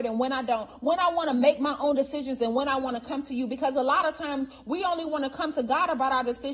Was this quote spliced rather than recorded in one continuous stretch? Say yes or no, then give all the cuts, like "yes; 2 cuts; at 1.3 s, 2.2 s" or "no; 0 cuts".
no; 0 cuts